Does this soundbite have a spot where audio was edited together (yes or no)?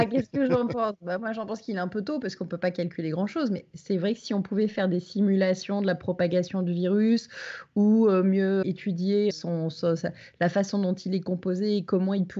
yes